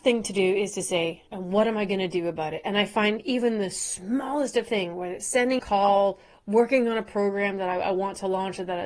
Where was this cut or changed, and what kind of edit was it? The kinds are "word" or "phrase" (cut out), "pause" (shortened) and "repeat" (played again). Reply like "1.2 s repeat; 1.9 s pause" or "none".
1.3 s pause; 5.6 s phrase